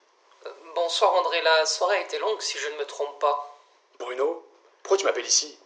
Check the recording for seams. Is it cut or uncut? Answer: uncut